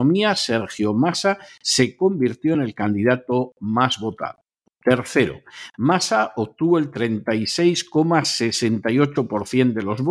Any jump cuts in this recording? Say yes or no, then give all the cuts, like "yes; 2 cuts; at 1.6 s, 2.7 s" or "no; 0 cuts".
no; 0 cuts